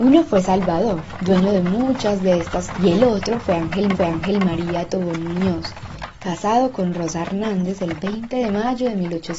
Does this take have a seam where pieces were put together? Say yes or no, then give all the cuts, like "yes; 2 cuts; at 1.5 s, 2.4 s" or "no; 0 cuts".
yes; 2 cuts; at 2.7 s, 3.9 s